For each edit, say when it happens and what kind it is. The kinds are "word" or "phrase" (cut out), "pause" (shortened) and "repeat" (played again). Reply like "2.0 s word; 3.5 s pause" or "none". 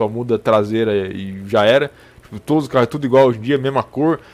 none